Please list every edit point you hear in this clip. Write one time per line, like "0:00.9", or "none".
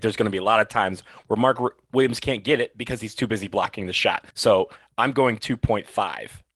0:04.3